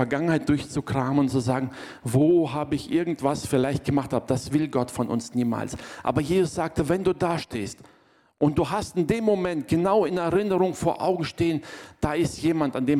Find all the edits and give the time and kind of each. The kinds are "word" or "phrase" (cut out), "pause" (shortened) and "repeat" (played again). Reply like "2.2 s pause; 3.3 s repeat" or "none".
none